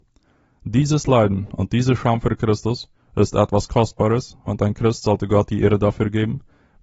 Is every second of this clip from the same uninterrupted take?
yes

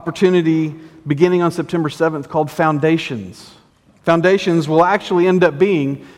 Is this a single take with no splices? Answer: no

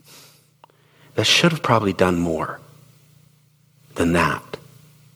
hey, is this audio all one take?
yes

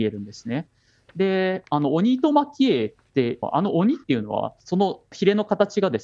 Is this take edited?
yes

